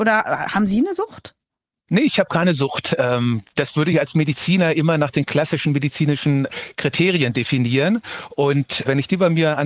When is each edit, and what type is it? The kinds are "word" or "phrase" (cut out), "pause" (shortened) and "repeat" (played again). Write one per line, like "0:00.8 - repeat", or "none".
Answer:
none